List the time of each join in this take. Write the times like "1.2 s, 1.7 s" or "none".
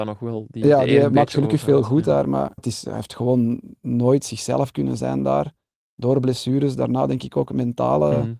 2.6 s